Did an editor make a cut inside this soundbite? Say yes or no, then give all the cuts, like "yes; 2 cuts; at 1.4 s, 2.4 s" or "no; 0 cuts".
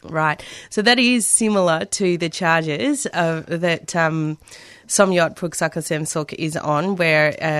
no; 0 cuts